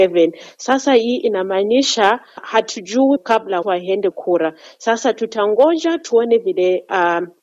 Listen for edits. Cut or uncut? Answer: cut